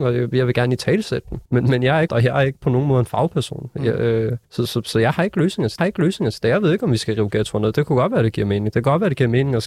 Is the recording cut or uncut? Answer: cut